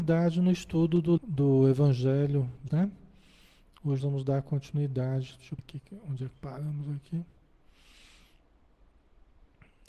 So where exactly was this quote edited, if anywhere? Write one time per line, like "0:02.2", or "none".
0:01.2
0:02.7
0:04.0
0:05.6
0:06.3